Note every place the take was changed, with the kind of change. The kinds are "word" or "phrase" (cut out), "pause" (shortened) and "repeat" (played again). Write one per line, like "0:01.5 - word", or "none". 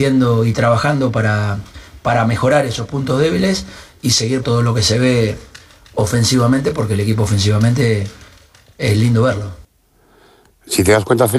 0:04.4 - word